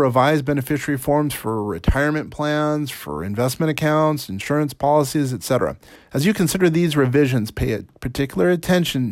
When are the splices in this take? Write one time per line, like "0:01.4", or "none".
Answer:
0:06.0